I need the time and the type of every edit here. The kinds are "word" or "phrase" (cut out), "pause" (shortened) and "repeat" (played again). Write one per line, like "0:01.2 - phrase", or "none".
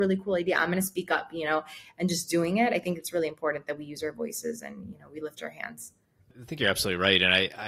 none